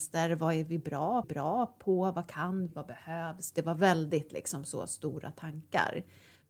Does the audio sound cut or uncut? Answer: cut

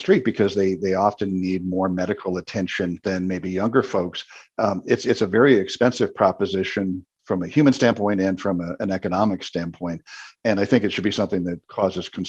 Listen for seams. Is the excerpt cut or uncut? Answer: uncut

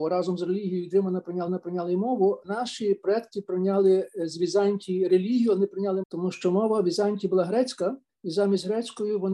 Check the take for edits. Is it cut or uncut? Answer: cut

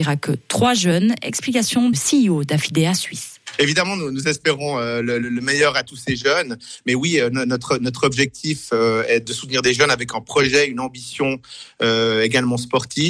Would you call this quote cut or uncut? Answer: cut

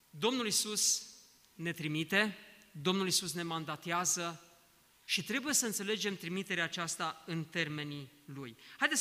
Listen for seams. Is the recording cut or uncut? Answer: uncut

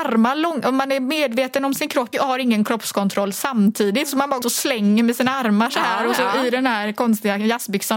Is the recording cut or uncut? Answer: cut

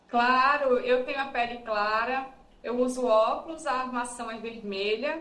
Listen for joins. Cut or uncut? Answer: uncut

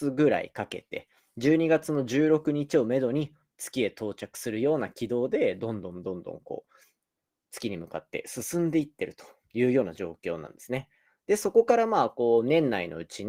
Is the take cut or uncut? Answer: uncut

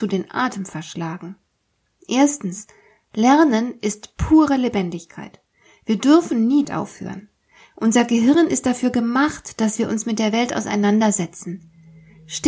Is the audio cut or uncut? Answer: cut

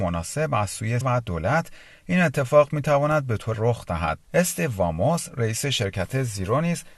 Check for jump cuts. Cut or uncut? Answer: cut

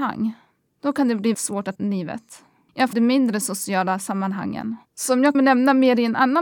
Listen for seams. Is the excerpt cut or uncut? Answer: cut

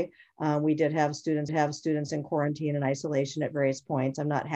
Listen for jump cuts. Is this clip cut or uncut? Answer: cut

